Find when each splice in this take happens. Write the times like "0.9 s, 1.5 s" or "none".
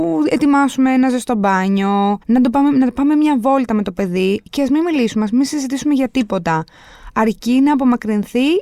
2.2 s